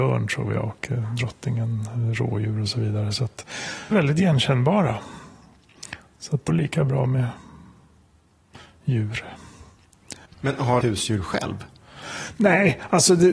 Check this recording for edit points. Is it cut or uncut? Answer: cut